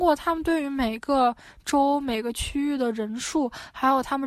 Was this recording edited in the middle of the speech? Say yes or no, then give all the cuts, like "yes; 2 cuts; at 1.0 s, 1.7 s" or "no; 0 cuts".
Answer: no; 0 cuts